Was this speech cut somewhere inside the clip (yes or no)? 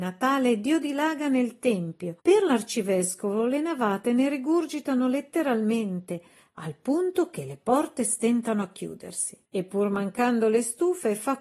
yes